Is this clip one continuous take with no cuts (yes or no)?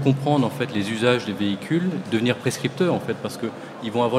yes